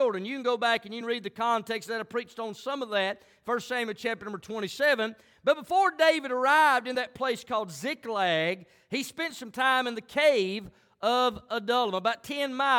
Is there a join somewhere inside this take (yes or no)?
no